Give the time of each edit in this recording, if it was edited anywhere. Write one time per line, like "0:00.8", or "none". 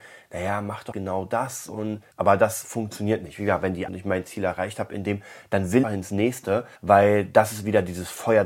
0:00.9
0:02.1
0:03.9
0:05.8
0:06.8